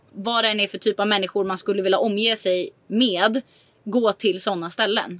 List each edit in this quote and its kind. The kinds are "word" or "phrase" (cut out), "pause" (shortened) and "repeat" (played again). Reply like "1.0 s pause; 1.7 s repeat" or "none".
none